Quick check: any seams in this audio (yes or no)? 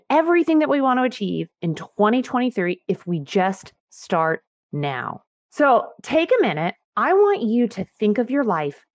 no